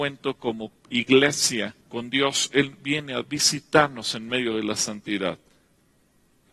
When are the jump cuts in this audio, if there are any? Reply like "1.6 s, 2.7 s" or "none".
1.8 s